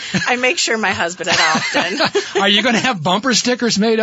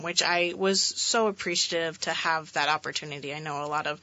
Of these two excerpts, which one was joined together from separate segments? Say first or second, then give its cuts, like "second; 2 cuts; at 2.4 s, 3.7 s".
first; 1 cut; at 1.2 s